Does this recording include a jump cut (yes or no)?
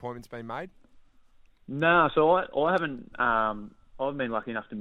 no